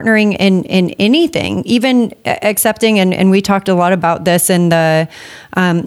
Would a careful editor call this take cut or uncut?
uncut